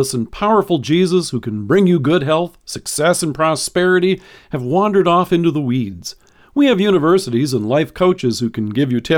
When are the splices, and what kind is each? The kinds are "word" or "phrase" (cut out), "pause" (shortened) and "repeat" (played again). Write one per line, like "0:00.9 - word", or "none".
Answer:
none